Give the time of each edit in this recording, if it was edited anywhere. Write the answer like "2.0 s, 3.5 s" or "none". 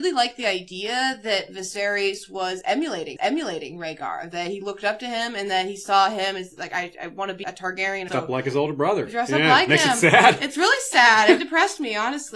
3.2 s, 7.4 s, 8.1 s, 11.4 s

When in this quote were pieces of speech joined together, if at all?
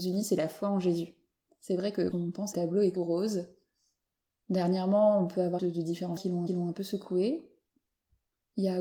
1.4 s, 2.1 s, 2.5 s, 3.0 s, 5.6 s, 6.2 s, 6.5 s

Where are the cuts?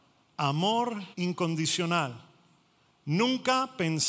1.1 s

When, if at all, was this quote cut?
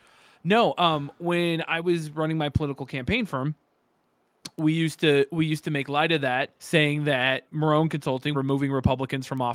6.6 s, 7.5 s, 8.3 s

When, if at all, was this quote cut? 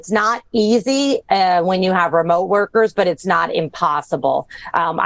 none

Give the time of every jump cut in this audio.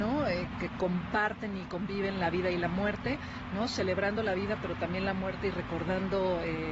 none

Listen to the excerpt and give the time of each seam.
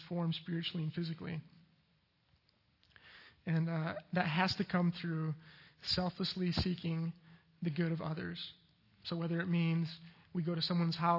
none

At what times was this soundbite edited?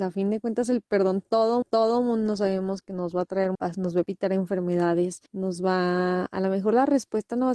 1.6 s, 3.5 s, 5.3 s

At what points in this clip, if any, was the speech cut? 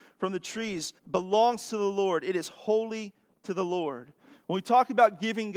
1.0 s

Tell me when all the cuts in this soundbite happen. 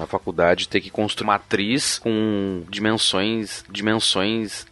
1.2 s, 3.7 s

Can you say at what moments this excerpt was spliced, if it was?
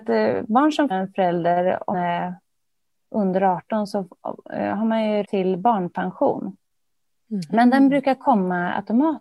0.9 s, 1.9 s, 5.2 s

